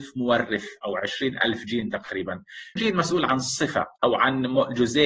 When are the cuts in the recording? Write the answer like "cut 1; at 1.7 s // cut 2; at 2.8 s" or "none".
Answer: cut 1; at 2.8 s // cut 2; at 4.0 s